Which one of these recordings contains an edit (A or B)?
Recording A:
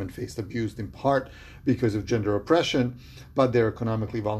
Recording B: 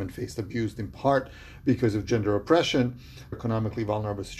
B